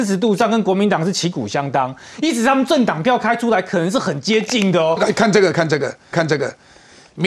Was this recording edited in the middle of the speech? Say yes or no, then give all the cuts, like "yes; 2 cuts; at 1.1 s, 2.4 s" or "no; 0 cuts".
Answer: yes; 2 cuts; at 5.0 s, 6.1 s